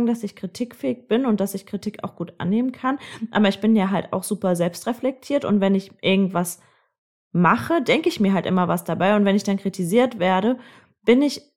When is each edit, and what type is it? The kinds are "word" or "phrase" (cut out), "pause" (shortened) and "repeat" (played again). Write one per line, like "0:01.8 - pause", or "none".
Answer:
none

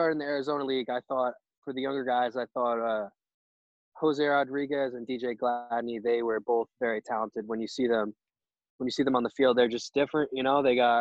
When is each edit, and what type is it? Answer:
none

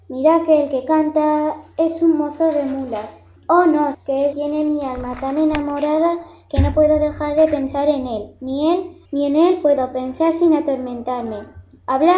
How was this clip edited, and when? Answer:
0:03.4 - pause
0:03.9 - word
0:04.3 - phrase
0:09.1 - pause

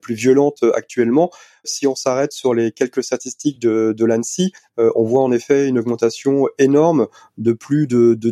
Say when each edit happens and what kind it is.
none

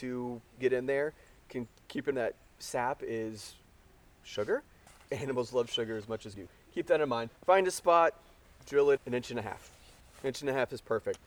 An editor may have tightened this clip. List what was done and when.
0:02.1 - word
0:04.9 - pause
0:06.3 - word
0:07.4 - pause
0:09.0 - word

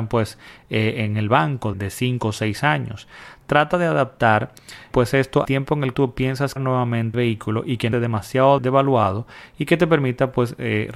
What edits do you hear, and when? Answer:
0:01.7 - word
0:04.9 - word
0:05.4 - word
0:05.9 - word
0:06.6 - word
0:07.1 - word
0:07.9 - word
0:08.6 - word

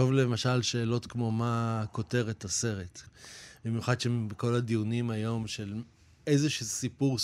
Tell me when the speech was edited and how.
none

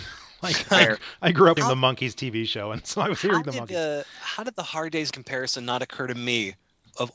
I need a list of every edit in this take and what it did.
0:01.6 - word
0:05.1 - word

